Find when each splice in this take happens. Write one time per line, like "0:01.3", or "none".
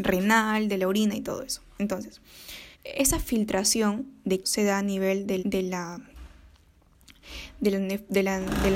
0:02.7
0:04.4
0:05.4